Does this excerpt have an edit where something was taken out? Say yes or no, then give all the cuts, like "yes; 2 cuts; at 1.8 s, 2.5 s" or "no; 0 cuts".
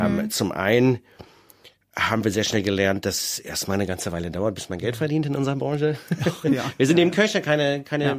no; 0 cuts